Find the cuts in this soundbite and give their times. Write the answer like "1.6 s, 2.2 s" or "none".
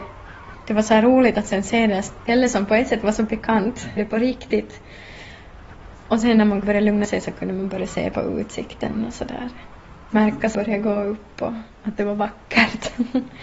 4.0 s, 6.6 s, 7.0 s, 10.5 s